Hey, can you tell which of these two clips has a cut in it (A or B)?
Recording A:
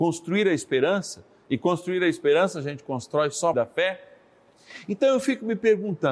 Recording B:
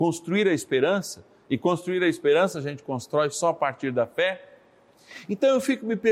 A